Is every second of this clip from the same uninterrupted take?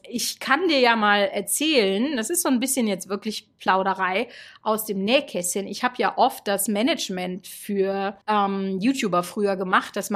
no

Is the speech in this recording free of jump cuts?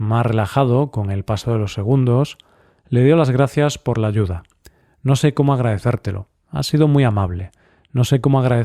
yes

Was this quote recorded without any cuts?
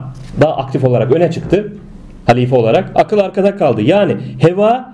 yes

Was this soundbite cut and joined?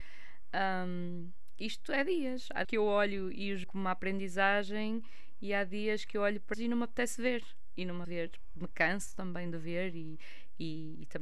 yes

